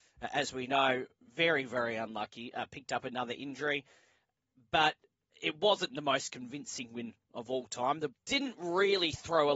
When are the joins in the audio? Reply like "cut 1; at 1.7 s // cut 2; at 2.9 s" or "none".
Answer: cut 1; at 8.1 s